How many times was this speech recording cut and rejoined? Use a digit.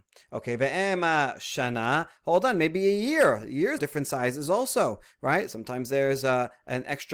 1